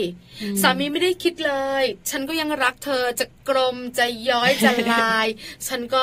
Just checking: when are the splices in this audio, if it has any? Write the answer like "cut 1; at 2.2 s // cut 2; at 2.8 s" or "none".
cut 1; at 2.0 s